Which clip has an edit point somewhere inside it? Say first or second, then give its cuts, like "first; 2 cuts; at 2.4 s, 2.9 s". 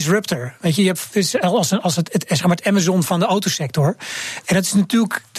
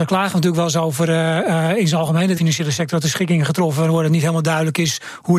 second; 1 cut; at 2.4 s